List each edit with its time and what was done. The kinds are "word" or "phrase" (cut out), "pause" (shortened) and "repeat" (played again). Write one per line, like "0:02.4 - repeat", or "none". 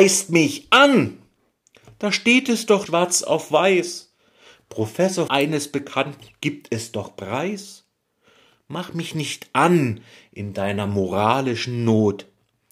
0:02.9 - word
0:05.3 - word